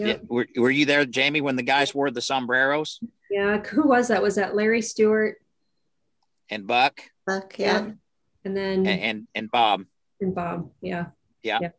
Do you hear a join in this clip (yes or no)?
no